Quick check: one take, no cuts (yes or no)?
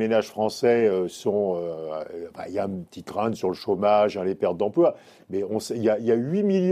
yes